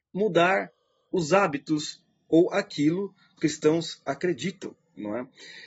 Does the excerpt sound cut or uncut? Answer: cut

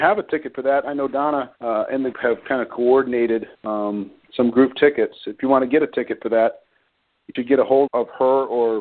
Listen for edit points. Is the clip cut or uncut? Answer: cut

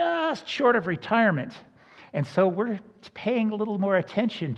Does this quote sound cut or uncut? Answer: uncut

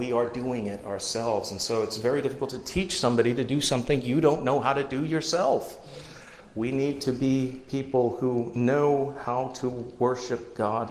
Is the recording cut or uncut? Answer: uncut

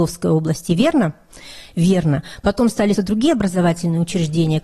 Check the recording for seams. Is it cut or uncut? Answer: cut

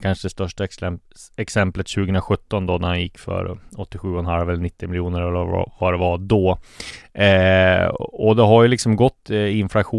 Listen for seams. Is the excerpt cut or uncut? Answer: uncut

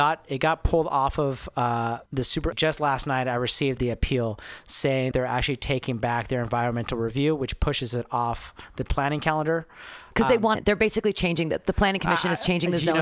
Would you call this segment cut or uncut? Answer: cut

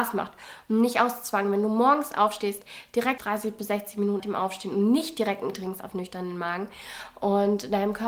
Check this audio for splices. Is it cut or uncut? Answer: cut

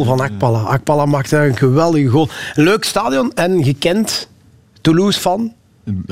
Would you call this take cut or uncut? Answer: uncut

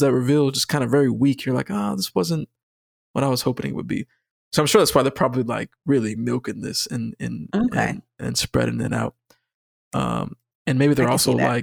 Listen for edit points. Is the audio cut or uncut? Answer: uncut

